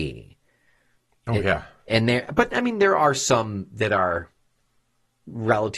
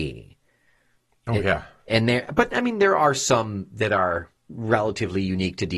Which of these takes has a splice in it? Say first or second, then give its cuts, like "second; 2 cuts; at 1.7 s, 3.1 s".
second; 1 cut; at 4.4 s